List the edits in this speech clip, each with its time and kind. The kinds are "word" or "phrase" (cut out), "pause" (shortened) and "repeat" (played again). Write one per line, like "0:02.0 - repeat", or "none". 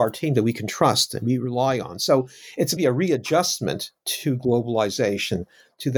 0:02.8 - word
0:04.0 - pause